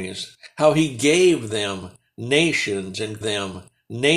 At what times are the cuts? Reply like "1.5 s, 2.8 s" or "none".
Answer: 3.2 s